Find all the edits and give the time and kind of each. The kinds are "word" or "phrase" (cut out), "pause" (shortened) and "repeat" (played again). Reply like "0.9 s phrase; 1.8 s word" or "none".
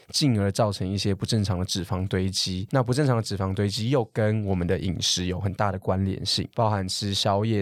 none